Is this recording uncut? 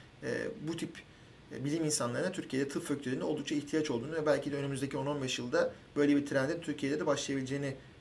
yes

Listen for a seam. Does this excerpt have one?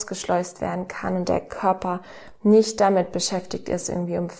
no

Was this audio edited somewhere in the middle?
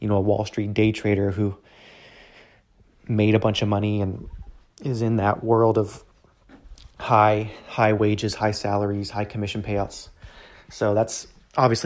no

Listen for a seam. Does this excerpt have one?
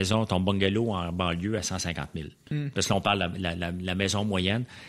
no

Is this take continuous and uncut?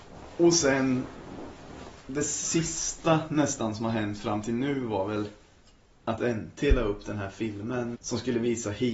no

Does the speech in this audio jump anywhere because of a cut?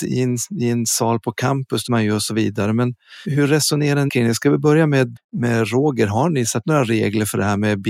yes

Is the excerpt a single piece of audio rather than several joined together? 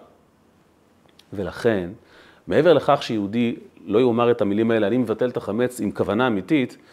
yes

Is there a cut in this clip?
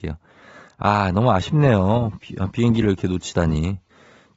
no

